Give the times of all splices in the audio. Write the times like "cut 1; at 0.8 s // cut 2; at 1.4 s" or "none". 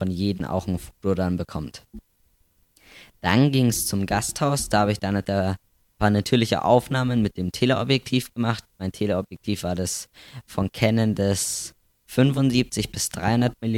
none